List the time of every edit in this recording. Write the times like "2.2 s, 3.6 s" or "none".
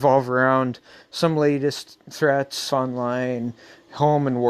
2.7 s